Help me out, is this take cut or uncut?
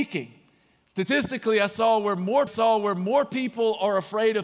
cut